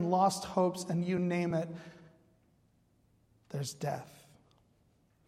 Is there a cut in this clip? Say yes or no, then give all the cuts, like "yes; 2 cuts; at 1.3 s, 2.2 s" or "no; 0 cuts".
no; 0 cuts